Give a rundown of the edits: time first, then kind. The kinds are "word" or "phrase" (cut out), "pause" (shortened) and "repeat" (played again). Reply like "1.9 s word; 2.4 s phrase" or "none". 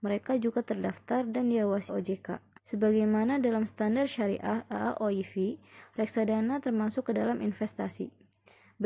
1.9 s word; 2.6 s pause